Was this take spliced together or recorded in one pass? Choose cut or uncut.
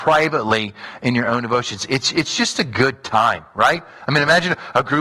uncut